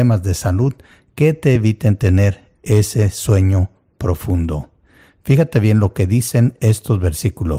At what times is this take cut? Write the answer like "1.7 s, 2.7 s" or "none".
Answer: none